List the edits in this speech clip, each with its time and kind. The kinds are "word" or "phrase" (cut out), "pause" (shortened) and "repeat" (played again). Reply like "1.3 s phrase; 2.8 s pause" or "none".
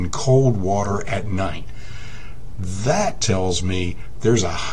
none